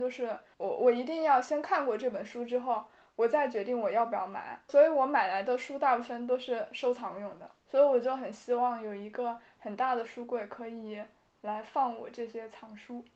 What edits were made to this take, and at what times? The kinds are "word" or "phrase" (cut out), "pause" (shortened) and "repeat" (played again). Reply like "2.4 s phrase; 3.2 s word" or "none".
none